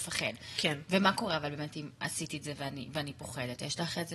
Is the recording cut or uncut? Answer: uncut